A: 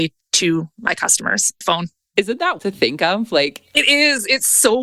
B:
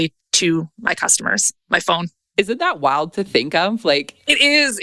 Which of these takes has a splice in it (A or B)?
A